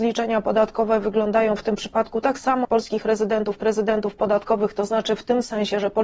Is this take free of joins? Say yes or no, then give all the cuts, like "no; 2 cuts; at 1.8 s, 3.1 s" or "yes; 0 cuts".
no; 2 cuts; at 2.6 s, 3.6 s